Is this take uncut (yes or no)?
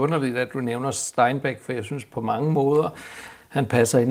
yes